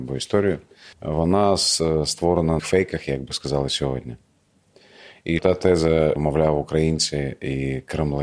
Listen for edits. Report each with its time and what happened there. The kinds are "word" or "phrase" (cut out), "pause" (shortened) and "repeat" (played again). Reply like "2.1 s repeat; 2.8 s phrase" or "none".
0.9 s pause; 2.6 s phrase; 5.4 s word; 6.2 s word